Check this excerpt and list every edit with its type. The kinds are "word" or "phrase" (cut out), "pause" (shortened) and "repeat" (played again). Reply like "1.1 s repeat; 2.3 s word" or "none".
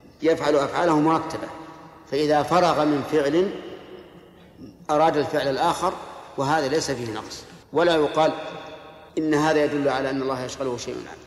7.6 s pause; 9.1 s pause